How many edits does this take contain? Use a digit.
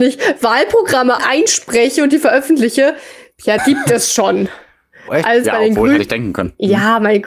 5